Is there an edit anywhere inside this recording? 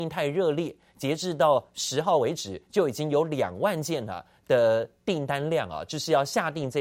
no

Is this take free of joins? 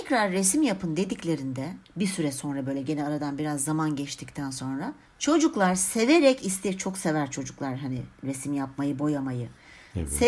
no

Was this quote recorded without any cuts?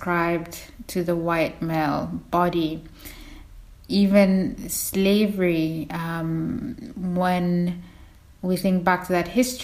yes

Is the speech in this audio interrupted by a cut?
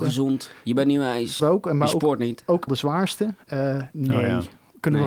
yes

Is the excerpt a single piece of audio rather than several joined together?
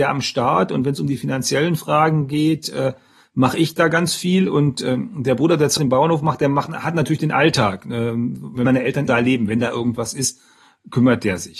no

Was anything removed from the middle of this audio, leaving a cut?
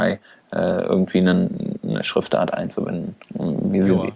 yes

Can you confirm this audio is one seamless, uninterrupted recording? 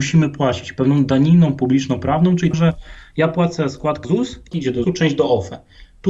no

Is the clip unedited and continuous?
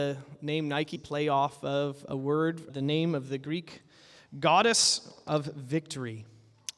no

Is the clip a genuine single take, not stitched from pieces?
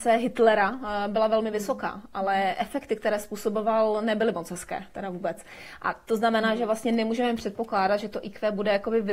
yes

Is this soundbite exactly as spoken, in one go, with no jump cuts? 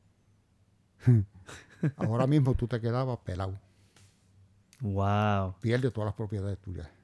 yes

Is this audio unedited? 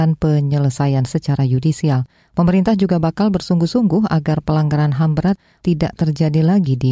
yes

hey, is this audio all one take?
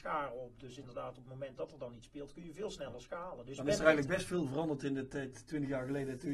yes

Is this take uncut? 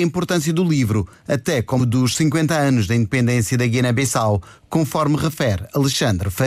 no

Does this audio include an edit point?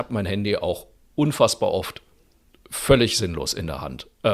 no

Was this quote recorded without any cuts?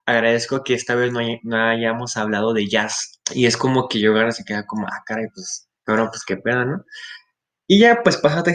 no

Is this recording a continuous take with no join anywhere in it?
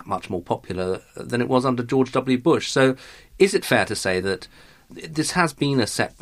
yes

